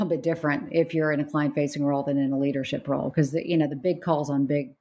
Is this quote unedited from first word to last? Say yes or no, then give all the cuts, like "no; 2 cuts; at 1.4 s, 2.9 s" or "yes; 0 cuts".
yes; 0 cuts